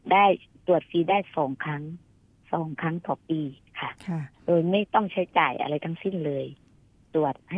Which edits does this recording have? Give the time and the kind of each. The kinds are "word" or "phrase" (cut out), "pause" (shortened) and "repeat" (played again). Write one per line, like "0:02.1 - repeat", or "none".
0:04.0 - pause